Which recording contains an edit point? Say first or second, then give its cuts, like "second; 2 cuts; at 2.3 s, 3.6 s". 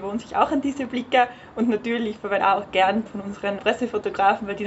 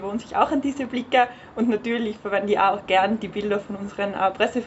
first; 3 cuts; at 2.4 s, 3.1 s, 3.6 s